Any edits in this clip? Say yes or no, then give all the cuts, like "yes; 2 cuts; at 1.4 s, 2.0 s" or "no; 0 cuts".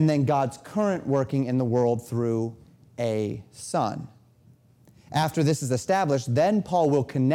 no; 0 cuts